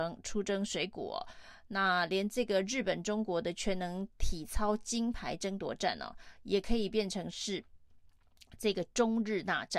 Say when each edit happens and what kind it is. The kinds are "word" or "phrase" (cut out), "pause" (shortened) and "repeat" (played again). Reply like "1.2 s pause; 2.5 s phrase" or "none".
none